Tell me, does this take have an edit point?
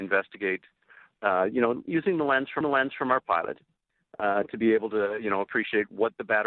yes; 1 cut; at 2.6 s

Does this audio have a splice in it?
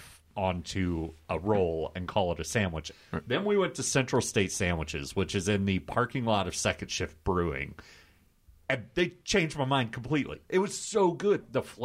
no; 0 cuts

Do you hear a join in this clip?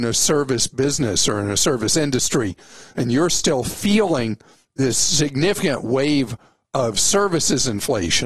no; 0 cuts

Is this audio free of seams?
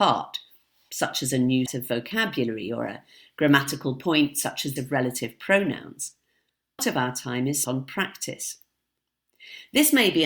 no; 4 cuts; at 1.7 s, 4.8 s, 6.8 s, 7.6 s

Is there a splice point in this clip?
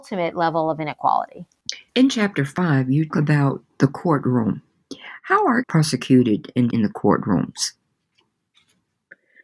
yes; 4 cuts; at 1.9 s, 3.1 s, 5.6 s, 6.7 s

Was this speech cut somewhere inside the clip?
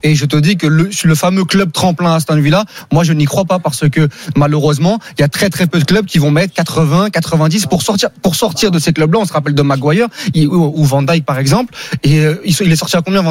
no; 0 cuts

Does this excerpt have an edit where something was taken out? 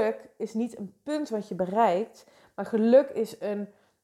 no; 0 cuts

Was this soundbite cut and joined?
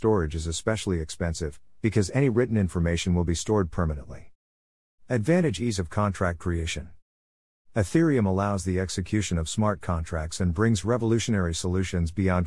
no; 0 cuts

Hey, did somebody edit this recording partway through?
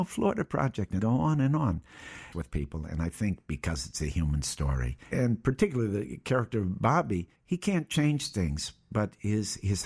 yes; 4 cuts; at 1.0 s, 2.3 s, 5.0 s, 7.4 s

